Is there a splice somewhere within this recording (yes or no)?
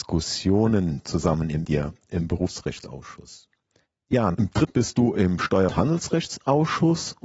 yes